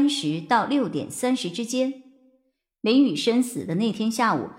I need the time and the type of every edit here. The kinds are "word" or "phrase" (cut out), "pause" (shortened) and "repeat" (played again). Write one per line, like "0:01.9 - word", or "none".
none